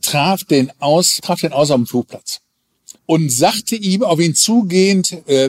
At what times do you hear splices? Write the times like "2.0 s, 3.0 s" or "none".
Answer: 1.2 s, 3.0 s